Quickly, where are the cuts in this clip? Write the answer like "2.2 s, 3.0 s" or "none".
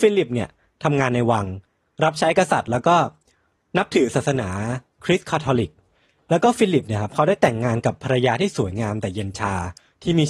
none